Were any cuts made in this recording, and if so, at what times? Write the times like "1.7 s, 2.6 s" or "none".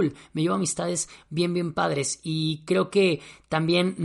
none